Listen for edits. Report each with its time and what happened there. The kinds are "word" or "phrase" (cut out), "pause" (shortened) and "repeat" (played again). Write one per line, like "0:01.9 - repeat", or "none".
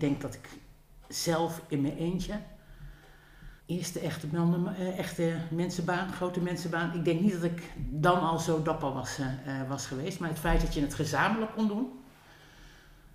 0:03.6 - pause